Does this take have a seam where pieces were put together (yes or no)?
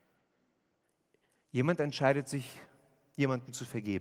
no